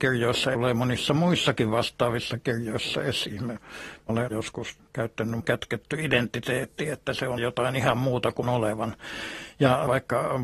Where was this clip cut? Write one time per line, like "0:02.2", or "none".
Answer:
0:05.4
0:07.4
0:08.4

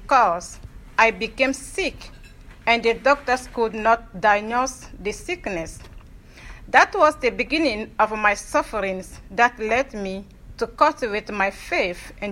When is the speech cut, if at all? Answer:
none

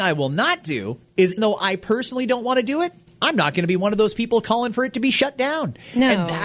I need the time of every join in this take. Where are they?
0:01.4

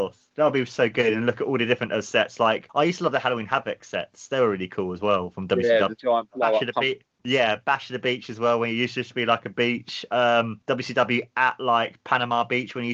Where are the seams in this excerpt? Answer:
0:07.2

